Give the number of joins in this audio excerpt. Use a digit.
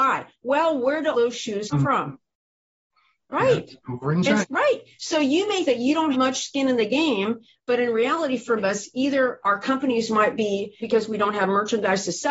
8